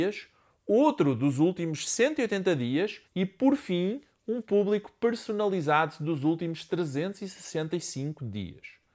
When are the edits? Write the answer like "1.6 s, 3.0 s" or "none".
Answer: 3.0 s

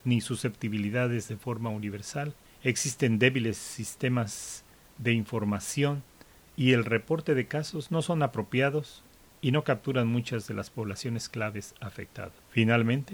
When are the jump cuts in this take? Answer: none

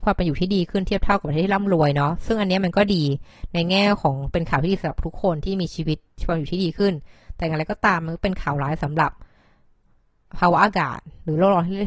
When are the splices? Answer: none

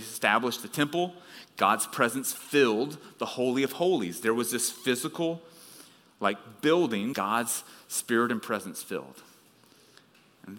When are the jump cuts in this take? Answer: 7.1 s

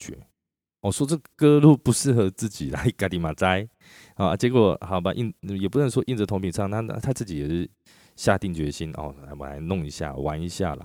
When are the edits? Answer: none

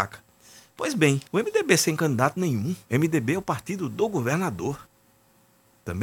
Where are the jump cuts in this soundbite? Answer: 1.3 s, 2.8 s

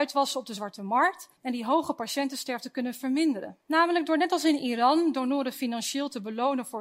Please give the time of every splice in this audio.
1.4 s, 3.6 s

